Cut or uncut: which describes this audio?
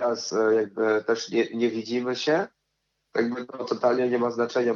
uncut